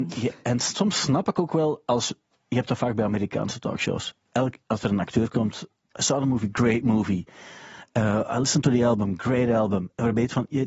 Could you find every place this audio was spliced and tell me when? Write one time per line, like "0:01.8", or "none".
none